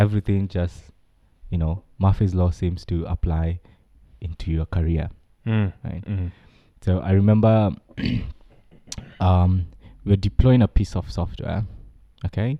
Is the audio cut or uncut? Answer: uncut